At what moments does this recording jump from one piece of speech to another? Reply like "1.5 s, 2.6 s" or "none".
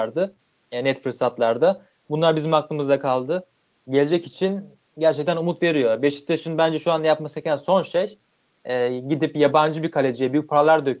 none

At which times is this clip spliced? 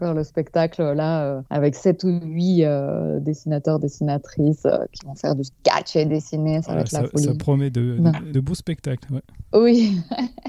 1.5 s

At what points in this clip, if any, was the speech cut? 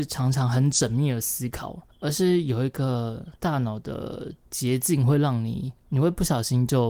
1.9 s, 3.4 s, 5.8 s

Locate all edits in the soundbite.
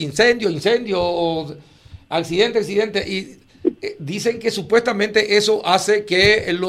none

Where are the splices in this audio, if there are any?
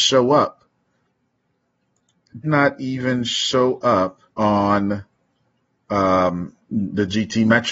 2.4 s, 4.3 s

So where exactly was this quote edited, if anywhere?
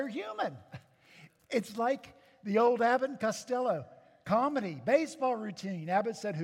none

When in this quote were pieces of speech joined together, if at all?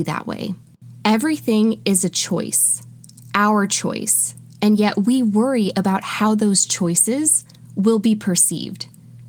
none

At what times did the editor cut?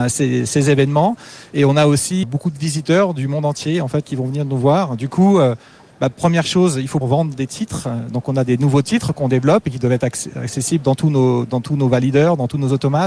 2.2 s, 7.0 s

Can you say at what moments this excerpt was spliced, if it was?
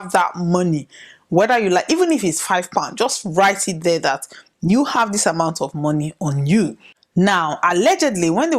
none

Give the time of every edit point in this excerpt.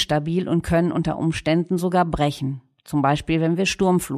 none

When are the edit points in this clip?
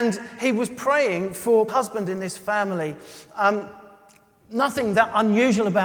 1.7 s

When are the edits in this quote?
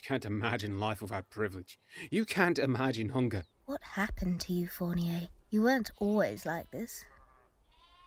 3.5 s, 5.4 s

